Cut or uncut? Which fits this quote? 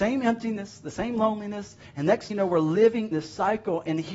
cut